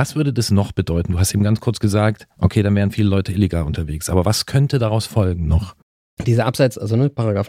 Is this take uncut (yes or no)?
yes